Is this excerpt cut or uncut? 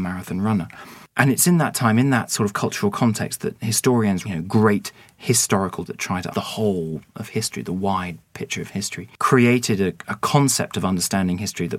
cut